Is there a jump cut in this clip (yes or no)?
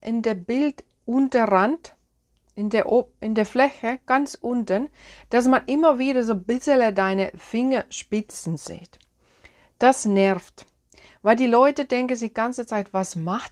no